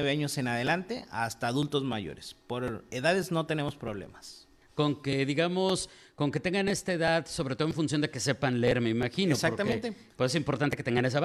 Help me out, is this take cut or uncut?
uncut